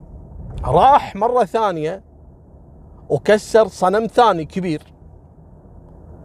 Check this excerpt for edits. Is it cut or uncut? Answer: uncut